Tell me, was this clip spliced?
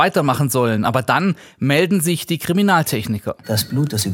no; 0 cuts

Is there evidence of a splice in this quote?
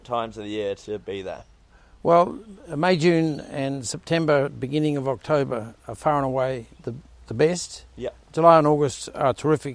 yes; 1 cut; at 5.8 s

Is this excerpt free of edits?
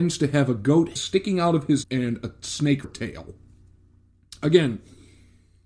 no; 3 cuts; at 1.0 s, 1.8 s, 2.8 s

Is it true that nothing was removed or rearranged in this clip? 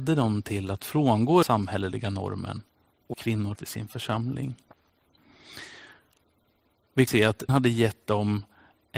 no; 5 cuts; at 1.4 s, 3.1 s, 3.5 s, 7.1 s, 7.5 s

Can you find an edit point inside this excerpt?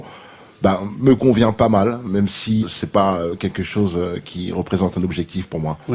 yes; 1 cut; at 2.6 s

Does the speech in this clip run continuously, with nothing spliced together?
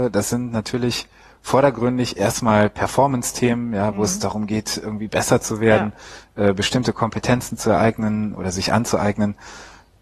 no; 1 cut; at 8.3 s

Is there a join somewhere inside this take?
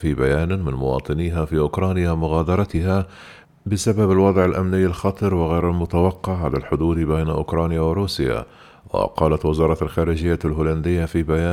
no; 0 cuts

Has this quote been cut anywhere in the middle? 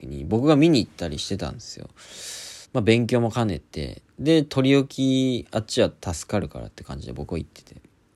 yes; 1 cut; at 2.6 s

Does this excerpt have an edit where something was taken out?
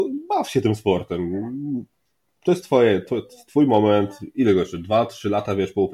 no; 0 cuts

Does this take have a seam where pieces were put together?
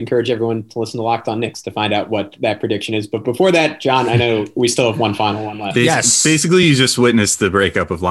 no; 0 cuts

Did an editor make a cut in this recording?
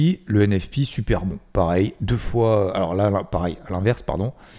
no; 0 cuts

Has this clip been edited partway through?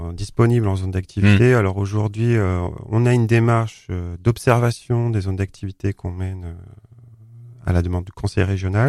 no; 0 cuts

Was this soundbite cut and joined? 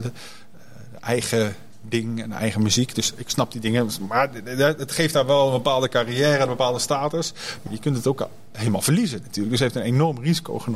yes; 1 cut; at 7.7 s

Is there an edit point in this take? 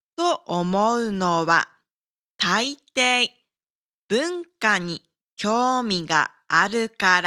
no; 0 cuts

